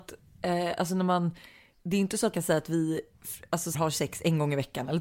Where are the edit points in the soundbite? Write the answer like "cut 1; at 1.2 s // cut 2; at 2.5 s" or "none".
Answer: cut 1; at 2.3 s // cut 2; at 3.7 s